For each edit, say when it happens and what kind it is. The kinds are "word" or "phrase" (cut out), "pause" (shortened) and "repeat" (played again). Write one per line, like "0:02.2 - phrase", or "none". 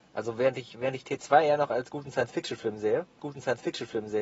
0:03.2 - repeat